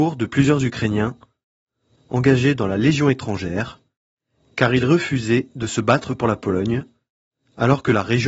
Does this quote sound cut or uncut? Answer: uncut